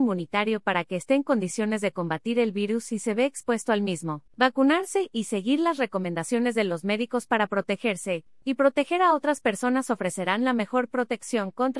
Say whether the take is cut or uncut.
cut